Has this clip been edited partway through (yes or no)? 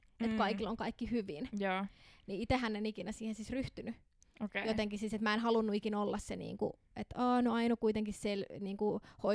no